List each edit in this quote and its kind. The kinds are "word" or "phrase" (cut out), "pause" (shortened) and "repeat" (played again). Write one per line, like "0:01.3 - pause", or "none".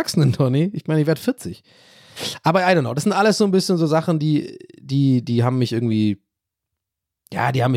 none